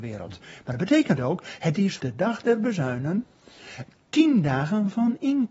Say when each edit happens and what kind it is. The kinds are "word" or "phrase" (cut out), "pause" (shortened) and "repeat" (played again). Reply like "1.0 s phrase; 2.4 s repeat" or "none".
2.0 s word